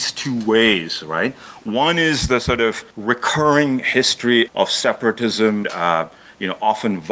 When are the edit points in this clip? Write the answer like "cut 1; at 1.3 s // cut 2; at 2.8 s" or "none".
cut 1; at 2.9 s // cut 2; at 4.5 s // cut 3; at 5.6 s